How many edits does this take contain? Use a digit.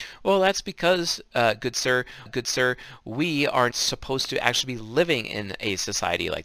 2